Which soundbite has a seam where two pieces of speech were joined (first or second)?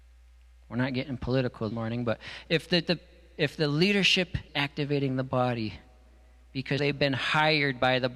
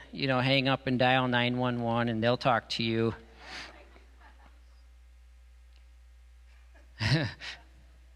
first